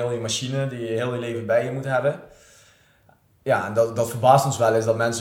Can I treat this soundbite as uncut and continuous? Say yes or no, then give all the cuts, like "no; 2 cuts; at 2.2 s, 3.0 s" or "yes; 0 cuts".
yes; 0 cuts